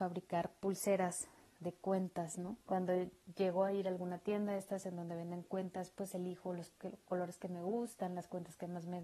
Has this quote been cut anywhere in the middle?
yes; 1 cut; at 2.6 s

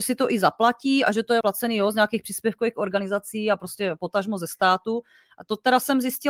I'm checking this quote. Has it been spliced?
yes; 1 cut; at 1.4 s

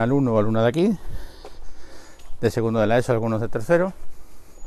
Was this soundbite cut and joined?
no; 0 cuts

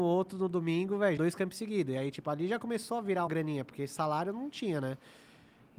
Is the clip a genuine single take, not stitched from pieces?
no; 2 cuts; at 1.2 s, 3.3 s

